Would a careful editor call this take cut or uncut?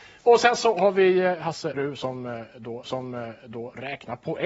cut